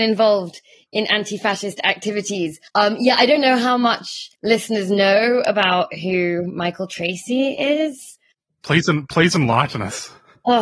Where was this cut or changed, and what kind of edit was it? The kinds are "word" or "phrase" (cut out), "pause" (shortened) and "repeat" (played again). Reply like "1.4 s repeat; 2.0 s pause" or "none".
2.7 s pause; 4.3 s pause